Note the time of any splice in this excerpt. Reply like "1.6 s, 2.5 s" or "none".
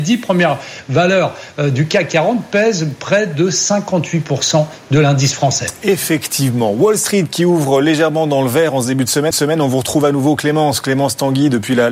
9.3 s